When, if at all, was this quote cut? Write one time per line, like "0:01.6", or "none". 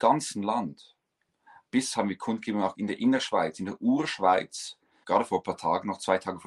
0:01.9
0:02.7
0:05.0